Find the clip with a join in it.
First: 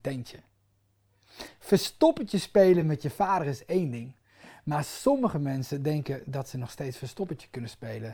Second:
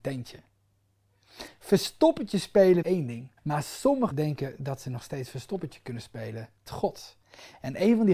second; 4 cuts; at 2.8 s, 3.4 s, 4.1 s, 6.7 s

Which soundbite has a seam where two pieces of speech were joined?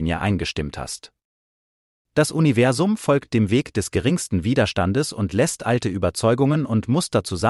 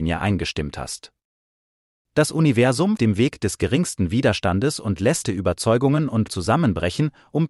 second; 3 cuts; at 3.0 s, 5.2 s, 6.3 s

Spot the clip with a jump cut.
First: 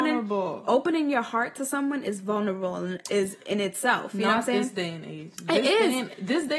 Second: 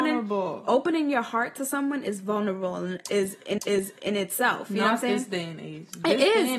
second; 1 cut; at 3.6 s

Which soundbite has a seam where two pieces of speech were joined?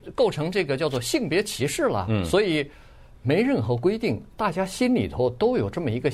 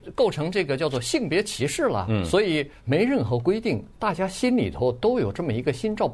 second; 1 cut; at 2.8 s

